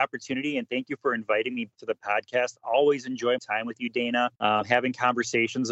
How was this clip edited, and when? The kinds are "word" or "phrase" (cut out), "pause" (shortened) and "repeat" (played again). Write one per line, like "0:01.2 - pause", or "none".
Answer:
0:01.8 - word
0:03.4 - word
0:04.4 - pause